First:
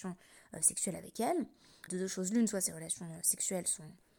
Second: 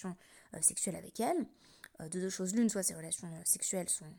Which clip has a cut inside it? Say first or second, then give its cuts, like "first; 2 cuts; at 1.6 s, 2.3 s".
first; 1 cut; at 1.9 s